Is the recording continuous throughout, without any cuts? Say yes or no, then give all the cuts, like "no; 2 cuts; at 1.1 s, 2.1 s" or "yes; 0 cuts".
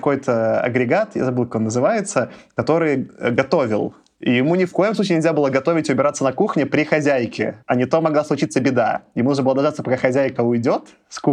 no; 1 cut; at 7.6 s